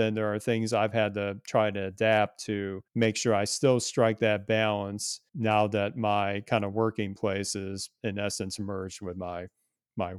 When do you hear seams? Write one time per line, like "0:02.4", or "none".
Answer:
0:02.9
0:05.3